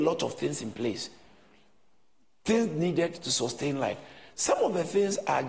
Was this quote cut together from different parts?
no; 0 cuts

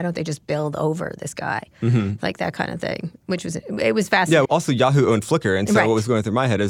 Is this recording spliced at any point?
yes; 1 cut; at 4.4 s

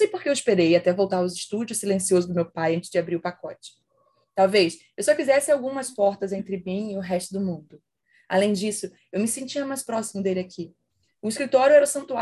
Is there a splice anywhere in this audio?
no; 0 cuts

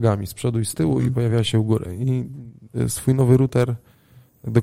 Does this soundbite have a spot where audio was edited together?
no; 0 cuts

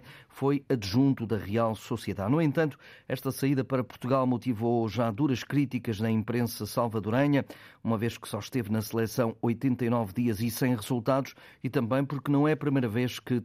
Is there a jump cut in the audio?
no; 0 cuts

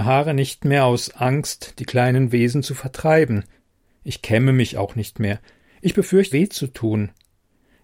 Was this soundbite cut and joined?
yes; 1 cut; at 6.3 s

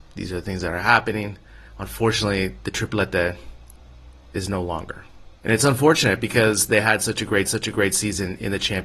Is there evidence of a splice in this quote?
yes; 3 cuts; at 1.7 s, 5.4 s, 7.4 s

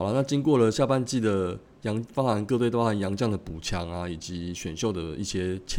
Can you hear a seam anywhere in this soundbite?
no; 0 cuts

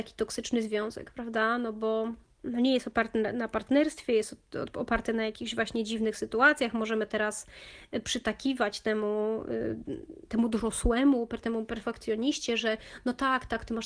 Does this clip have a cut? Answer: no; 0 cuts

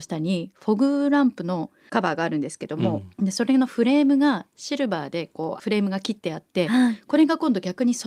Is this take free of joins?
yes; 0 cuts

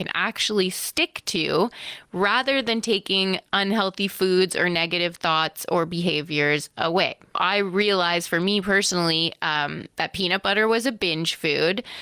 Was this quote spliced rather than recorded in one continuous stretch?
no; 0 cuts

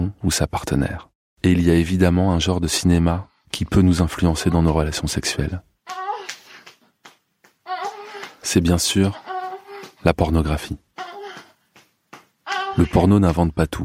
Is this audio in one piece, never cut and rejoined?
yes; 0 cuts

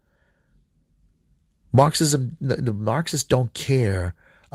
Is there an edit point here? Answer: no; 0 cuts

